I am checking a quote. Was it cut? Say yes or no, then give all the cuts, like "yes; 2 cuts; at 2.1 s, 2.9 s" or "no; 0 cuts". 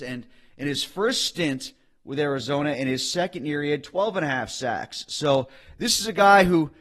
no; 0 cuts